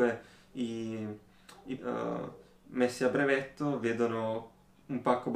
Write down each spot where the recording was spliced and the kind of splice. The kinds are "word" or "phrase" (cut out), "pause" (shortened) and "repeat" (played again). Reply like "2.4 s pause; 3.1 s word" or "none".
1.8 s word